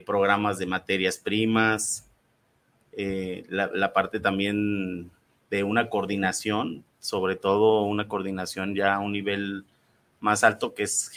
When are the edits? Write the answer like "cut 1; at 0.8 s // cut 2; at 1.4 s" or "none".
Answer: none